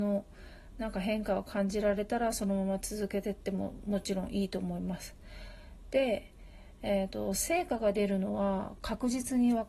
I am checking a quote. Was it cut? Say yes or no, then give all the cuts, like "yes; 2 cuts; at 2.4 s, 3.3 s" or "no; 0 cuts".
no; 0 cuts